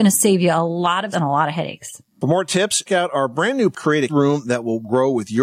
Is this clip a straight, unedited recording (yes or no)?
no